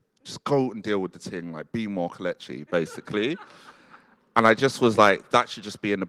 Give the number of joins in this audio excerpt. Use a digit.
0